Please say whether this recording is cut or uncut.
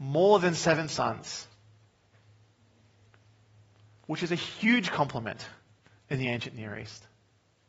uncut